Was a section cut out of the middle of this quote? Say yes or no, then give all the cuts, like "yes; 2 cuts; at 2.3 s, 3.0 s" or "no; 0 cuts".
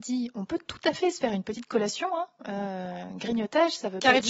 no; 0 cuts